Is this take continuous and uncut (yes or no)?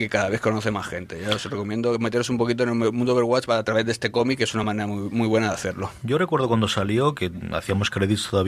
yes